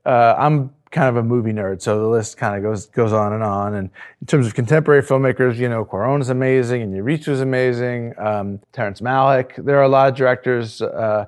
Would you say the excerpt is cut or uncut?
cut